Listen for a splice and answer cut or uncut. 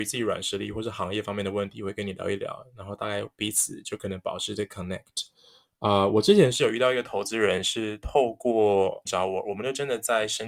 cut